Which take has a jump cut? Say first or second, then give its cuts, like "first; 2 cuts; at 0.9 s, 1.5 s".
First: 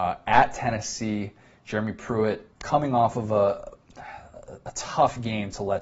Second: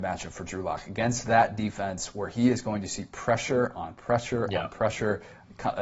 first; 1 cut; at 2.5 s